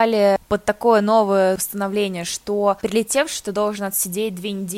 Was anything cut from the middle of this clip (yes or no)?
no